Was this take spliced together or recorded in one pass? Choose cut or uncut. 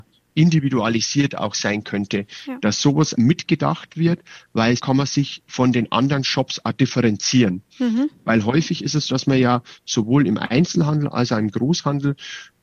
cut